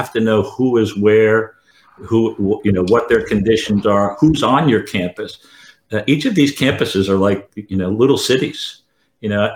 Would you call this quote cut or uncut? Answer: uncut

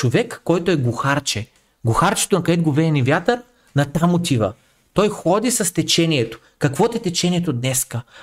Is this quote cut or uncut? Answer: uncut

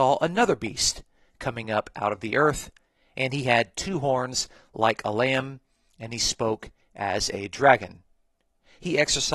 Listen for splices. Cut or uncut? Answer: uncut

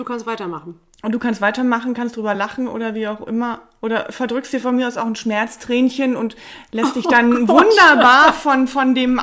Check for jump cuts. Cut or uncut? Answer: uncut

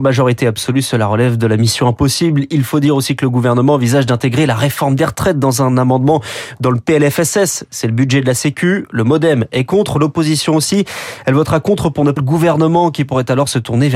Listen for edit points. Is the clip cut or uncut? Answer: cut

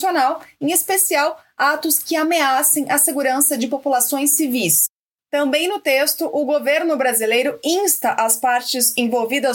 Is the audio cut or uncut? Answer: uncut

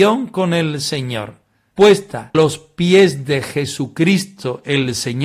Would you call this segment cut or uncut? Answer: cut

